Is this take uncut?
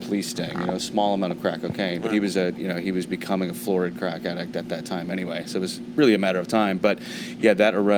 yes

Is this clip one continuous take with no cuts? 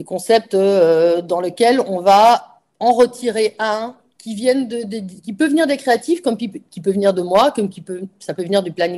yes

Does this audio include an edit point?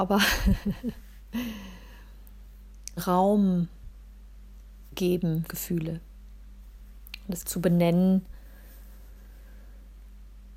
yes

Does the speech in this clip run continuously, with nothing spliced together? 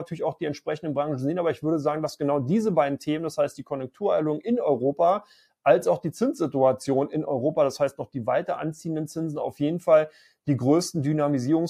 yes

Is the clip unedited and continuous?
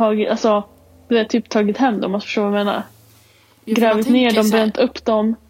yes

